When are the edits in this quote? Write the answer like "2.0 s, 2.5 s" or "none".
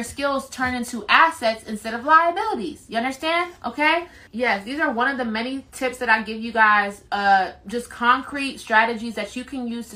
none